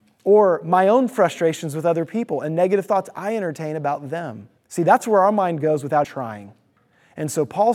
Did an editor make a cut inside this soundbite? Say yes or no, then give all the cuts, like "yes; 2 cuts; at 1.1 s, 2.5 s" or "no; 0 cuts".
yes; 2 cuts; at 4.6 s, 6.0 s